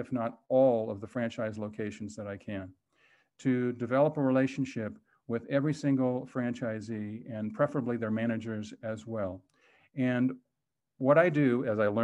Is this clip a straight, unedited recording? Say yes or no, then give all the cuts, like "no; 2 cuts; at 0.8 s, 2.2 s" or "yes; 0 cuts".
yes; 0 cuts